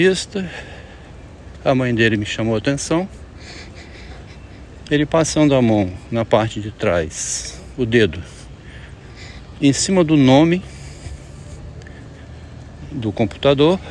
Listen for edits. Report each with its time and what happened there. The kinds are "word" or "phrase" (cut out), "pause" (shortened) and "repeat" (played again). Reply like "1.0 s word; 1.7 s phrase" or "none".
none